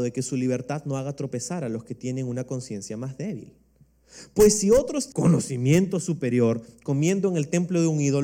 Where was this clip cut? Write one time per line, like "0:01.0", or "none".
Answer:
0:05.1